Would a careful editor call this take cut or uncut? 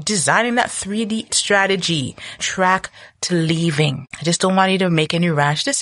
cut